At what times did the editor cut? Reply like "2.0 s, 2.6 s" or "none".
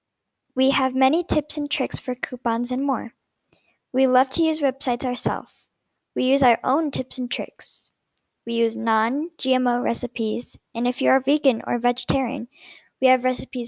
none

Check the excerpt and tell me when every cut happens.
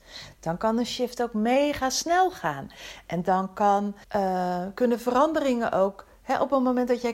4.0 s

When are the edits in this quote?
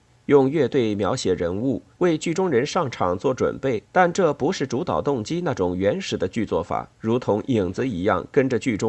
1.9 s, 3.8 s, 6.9 s

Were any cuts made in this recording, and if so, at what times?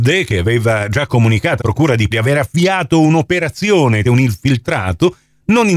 1.6 s, 2.1 s, 4.0 s

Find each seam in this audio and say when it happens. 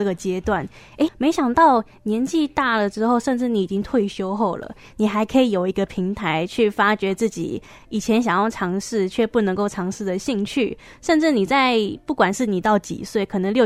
1.1 s

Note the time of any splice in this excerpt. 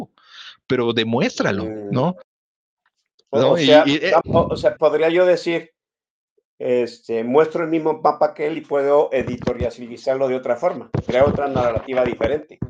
4.2 s, 4.8 s

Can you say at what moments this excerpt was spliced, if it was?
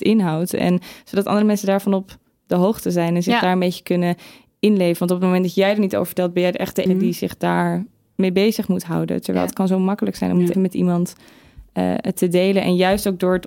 6.9 s, 10.5 s

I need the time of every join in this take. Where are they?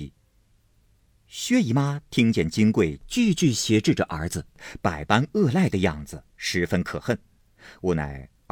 none

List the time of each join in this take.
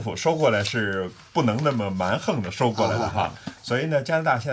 none

